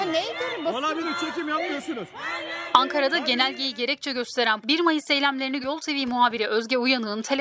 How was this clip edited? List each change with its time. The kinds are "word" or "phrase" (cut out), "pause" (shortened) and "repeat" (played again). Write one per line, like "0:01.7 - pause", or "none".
0:04.6 - word
0:05.6 - word